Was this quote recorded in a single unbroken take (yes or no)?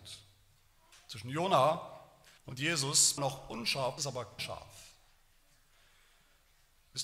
no